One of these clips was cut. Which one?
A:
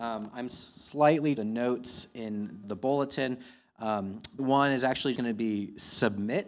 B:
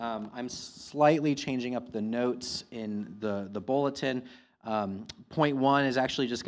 A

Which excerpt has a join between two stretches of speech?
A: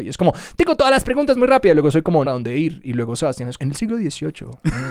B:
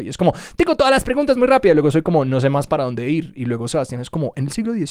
A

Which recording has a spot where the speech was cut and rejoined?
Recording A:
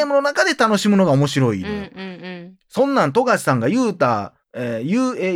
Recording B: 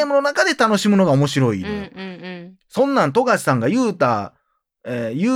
A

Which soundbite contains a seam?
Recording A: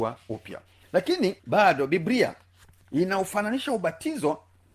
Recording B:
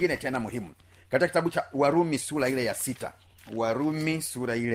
A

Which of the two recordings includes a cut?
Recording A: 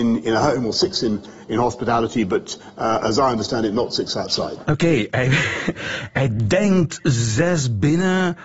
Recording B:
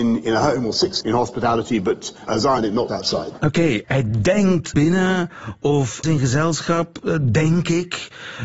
B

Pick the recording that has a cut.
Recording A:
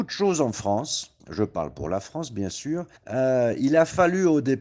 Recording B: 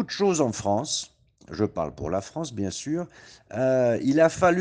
A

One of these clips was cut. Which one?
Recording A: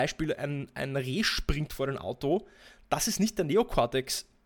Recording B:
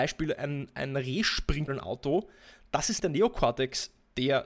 B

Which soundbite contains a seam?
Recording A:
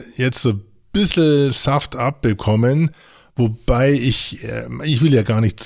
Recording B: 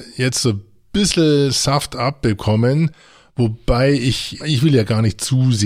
B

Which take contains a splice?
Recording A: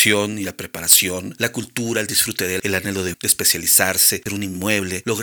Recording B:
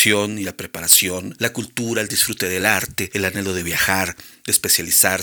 A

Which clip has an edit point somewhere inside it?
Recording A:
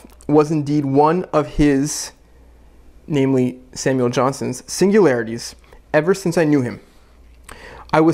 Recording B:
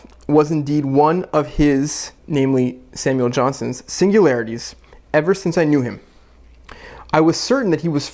B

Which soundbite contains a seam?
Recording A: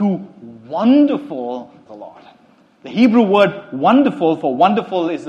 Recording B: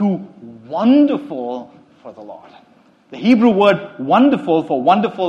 A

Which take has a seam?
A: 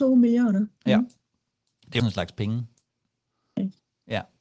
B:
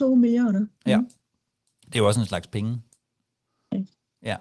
A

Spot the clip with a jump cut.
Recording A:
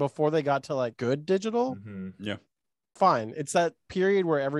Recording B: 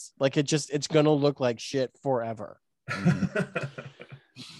A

